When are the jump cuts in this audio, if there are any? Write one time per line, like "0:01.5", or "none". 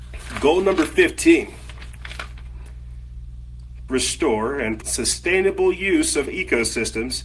0:03.9
0:04.8
0:06.3